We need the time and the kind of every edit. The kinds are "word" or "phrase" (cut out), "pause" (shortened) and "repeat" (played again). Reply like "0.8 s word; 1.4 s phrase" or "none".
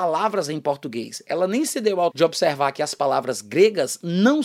2.1 s word